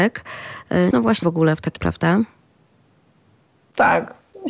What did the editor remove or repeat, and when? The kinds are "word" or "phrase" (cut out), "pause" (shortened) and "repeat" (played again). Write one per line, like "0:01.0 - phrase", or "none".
0:00.9 - word
0:01.2 - word
0:01.8 - word